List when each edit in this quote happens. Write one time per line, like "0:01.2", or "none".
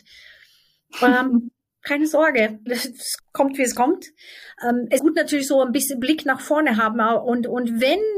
0:02.7
0:03.2
0:05.0